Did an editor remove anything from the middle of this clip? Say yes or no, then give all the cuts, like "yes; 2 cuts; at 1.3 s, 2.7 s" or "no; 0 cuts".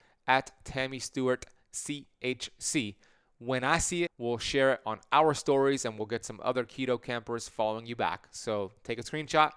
yes; 1 cut; at 4.1 s